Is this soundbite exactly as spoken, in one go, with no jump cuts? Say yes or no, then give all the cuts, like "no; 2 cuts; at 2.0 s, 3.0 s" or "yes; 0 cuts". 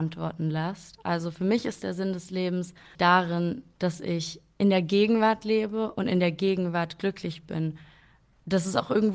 no; 1 cut; at 2.9 s